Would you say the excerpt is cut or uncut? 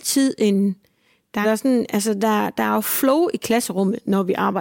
cut